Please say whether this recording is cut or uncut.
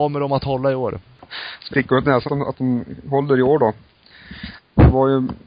cut